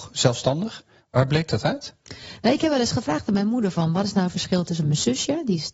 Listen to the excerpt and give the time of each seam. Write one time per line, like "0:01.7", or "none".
0:01.0
0:02.0
0:04.8